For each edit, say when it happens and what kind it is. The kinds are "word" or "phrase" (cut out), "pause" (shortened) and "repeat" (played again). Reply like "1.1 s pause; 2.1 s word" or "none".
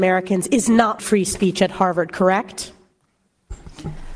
1.0 s word